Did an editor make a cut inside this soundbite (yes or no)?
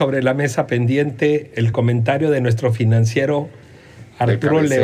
no